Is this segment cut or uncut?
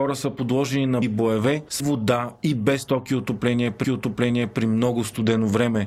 cut